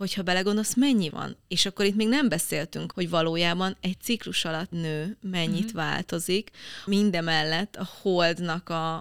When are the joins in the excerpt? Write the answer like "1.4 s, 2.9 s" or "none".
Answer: 1.1 s, 2.9 s, 4.7 s, 6.9 s